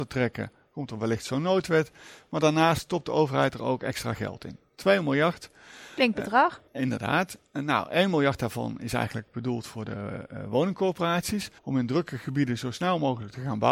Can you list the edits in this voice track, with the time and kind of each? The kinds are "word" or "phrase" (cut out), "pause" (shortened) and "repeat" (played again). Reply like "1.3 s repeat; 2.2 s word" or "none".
6.7 s pause; 11.6 s pause